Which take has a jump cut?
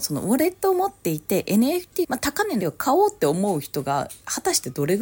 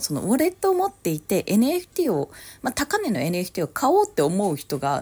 first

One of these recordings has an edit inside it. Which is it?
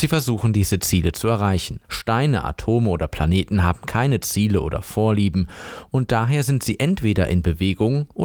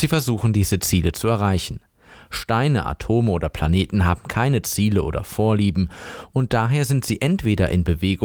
first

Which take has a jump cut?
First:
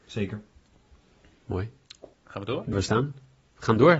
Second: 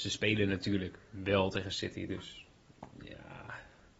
first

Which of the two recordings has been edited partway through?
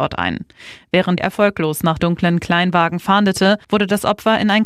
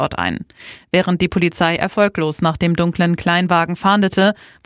first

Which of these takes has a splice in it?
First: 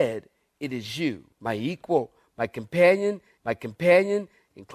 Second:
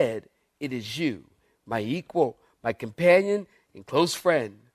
first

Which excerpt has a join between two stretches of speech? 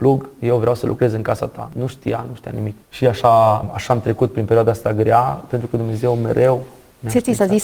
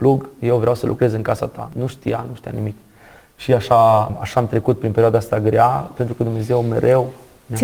first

